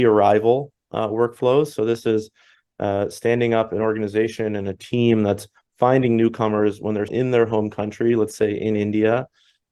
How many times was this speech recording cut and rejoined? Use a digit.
1